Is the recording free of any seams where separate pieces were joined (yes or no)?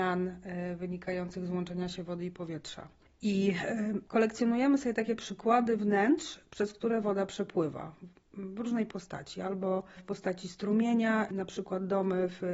yes